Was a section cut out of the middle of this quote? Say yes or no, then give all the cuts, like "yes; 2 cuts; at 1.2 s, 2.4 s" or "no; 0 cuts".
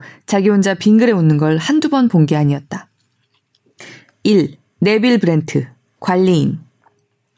no; 0 cuts